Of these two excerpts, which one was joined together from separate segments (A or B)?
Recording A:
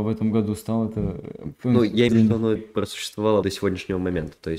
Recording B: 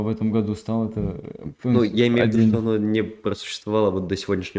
A